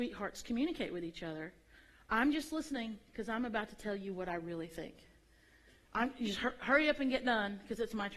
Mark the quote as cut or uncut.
uncut